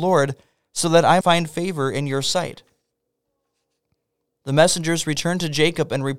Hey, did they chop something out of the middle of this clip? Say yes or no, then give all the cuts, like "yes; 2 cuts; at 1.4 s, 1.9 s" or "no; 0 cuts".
yes; 1 cut; at 1.2 s